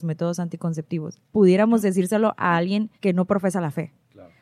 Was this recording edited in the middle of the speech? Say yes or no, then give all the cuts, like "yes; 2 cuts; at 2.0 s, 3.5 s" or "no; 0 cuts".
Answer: yes; 2 cuts; at 1.3 s, 3.0 s